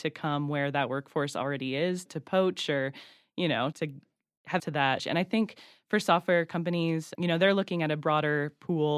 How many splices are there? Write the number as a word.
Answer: five